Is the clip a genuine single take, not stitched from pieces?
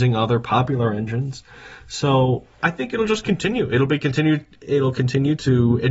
no; 1 cut; at 2.6 s

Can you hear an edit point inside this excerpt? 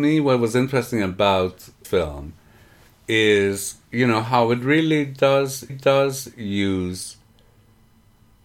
yes; 2 cuts; at 1.8 s, 5.7 s

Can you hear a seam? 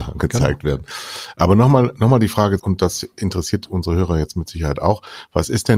yes; 1 cut; at 2.6 s

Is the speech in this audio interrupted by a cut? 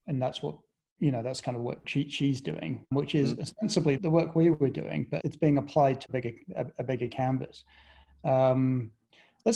yes; 4 cuts; at 2.9 s, 4.0 s, 5.2 s, 6.1 s

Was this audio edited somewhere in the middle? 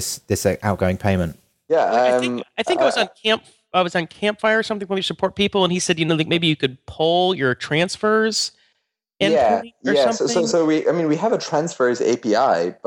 no; 0 cuts

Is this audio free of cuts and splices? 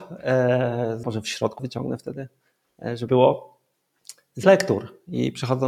no; 4 cuts; at 1.0 s, 1.6 s, 3.1 s, 4.4 s

